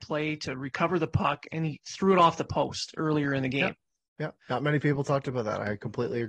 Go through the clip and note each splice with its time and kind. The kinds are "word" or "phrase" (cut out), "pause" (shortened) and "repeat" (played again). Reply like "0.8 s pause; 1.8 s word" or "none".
4.4 s pause